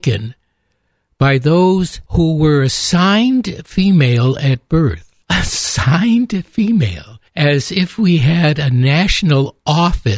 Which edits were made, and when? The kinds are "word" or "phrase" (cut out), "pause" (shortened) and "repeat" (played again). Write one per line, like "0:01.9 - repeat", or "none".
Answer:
0:02.1 - pause
0:05.2 - pause
0:07.3 - pause